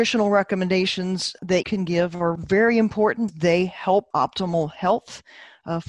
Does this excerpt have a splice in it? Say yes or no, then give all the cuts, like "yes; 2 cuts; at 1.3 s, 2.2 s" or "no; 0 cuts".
yes; 4 cuts; at 1.6 s, 2.4 s, 3.3 s, 4.1 s